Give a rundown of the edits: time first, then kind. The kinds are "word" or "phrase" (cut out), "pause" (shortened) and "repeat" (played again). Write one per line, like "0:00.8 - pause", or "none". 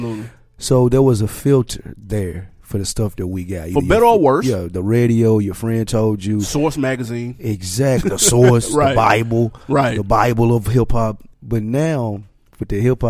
0:08.0 - word
0:11.3 - pause